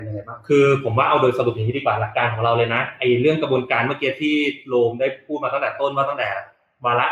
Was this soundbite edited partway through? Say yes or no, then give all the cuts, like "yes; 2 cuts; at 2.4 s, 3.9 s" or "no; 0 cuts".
no; 0 cuts